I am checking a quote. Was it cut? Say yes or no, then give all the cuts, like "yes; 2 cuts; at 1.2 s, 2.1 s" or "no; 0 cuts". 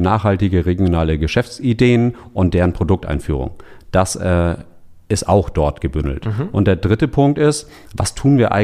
no; 0 cuts